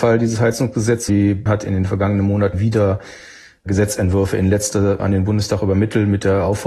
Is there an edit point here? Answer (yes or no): yes